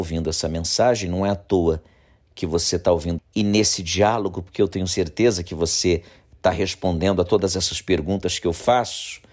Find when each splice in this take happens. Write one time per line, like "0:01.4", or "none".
0:03.2